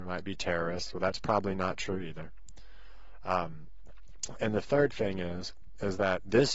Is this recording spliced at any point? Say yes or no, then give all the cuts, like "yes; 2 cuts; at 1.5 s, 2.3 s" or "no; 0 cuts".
yes; 1 cut; at 4.3 s